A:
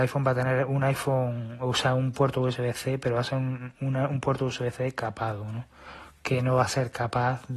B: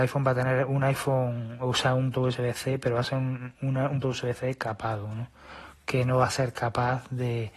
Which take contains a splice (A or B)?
B